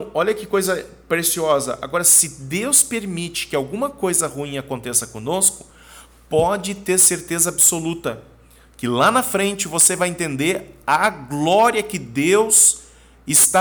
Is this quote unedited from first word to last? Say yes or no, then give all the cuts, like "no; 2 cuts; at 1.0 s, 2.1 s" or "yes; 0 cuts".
yes; 0 cuts